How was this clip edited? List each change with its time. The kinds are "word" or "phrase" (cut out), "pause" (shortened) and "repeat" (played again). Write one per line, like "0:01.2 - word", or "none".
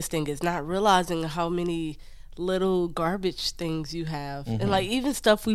none